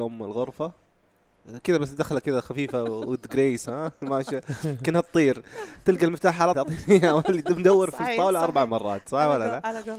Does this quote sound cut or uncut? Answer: cut